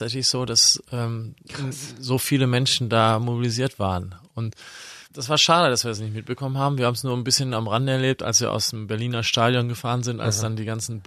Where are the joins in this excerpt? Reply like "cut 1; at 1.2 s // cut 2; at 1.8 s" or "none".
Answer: cut 1; at 5.0 s